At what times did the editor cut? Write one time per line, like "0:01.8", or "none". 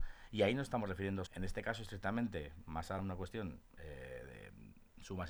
0:01.3
0:03.0